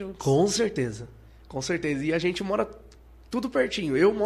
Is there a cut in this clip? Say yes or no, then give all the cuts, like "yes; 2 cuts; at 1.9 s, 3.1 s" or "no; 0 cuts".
no; 0 cuts